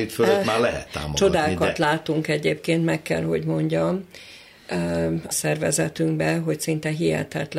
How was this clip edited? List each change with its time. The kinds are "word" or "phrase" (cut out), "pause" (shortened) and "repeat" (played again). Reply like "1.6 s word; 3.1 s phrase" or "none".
5.3 s word